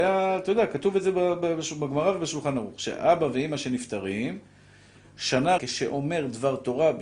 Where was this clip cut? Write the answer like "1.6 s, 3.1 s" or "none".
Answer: 5.6 s

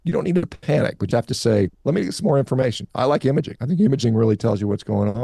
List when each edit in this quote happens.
1.1 s, 1.7 s

